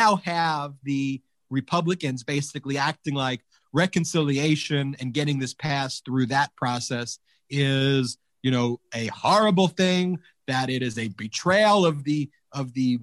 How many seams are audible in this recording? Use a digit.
0